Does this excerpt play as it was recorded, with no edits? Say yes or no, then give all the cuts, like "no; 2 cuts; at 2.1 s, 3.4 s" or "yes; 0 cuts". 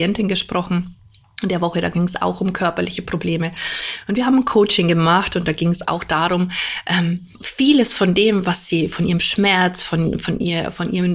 no; 1 cut; at 7.3 s